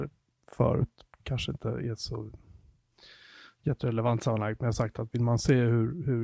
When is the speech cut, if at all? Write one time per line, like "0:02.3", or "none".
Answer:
0:01.1

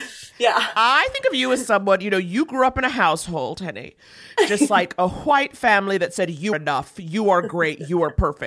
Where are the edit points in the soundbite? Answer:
0:06.5

